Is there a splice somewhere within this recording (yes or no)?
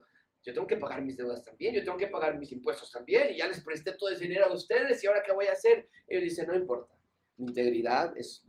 no